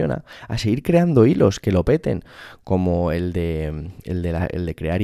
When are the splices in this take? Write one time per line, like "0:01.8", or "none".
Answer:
none